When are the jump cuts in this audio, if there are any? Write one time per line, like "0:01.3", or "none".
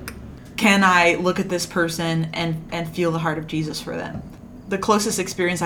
none